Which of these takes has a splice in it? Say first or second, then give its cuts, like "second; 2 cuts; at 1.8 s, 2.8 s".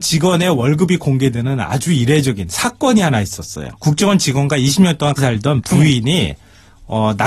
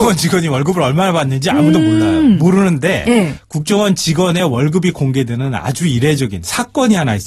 first; 2 cuts; at 3.8 s, 5.2 s